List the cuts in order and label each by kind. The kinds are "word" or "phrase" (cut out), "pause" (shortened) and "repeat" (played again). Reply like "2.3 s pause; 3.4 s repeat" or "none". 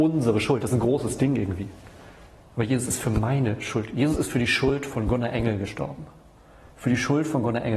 none